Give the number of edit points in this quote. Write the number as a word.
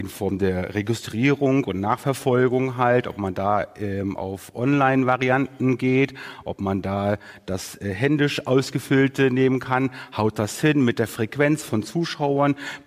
zero